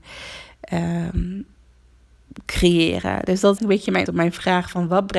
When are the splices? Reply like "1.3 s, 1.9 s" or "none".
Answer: 3.6 s, 4.1 s